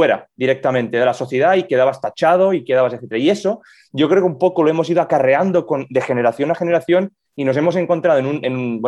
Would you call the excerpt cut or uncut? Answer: uncut